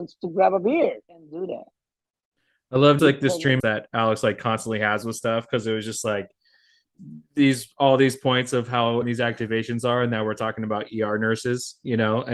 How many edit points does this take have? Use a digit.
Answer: 4